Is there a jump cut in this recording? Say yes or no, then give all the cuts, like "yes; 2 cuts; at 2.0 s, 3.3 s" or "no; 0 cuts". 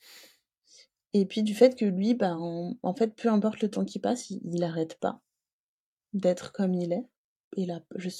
no; 0 cuts